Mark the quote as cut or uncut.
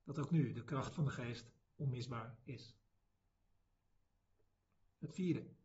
uncut